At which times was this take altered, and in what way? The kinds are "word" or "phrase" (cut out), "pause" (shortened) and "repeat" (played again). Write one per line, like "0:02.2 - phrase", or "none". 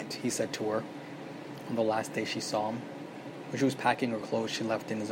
none